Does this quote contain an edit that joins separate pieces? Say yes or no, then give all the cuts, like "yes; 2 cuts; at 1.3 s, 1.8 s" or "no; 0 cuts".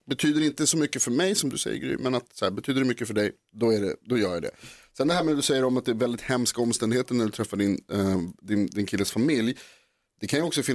no; 0 cuts